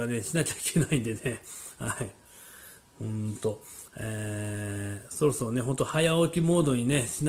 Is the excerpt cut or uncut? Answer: uncut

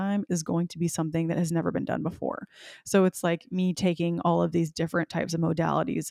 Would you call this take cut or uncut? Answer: uncut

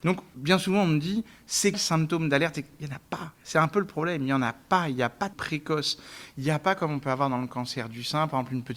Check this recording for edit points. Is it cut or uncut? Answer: cut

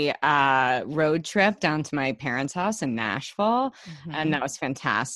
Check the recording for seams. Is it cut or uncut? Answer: uncut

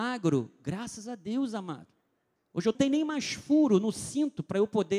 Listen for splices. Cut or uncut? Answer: cut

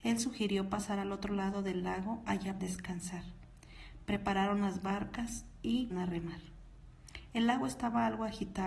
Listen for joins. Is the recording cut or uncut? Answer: cut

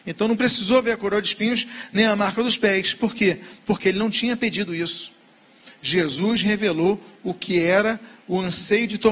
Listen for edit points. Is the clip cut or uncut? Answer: uncut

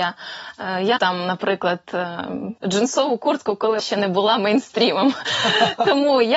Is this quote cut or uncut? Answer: cut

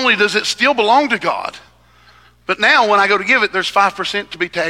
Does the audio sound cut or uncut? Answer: uncut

